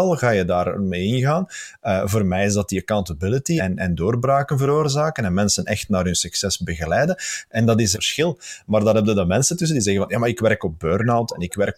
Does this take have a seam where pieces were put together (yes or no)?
yes